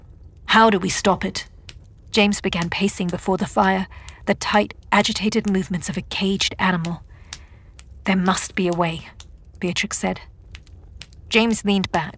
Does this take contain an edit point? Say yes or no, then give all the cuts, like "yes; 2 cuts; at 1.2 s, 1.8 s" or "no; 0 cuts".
no; 0 cuts